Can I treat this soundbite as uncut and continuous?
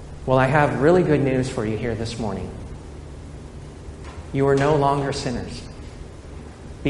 yes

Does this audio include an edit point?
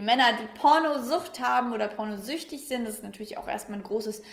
no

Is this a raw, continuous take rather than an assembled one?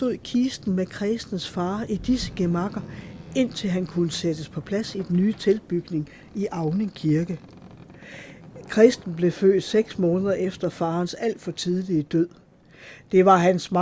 yes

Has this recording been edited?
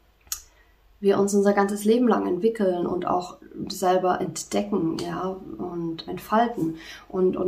yes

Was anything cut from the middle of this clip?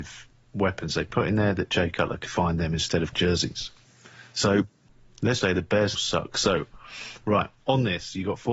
yes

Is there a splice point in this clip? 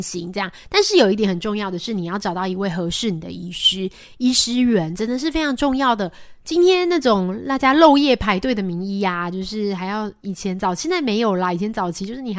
no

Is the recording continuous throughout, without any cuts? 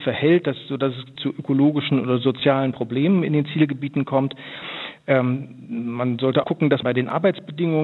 no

